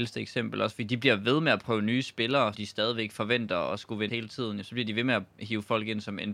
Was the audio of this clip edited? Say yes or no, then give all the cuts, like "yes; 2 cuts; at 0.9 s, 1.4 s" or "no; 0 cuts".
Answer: yes; 2 cuts; at 2.5 s, 4.1 s